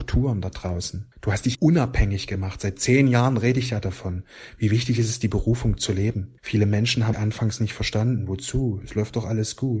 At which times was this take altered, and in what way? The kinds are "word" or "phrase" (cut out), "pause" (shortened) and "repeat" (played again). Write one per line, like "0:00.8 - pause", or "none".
0:01.1 - pause
0:01.5 - word
0:06.4 - pause
0:07.1 - word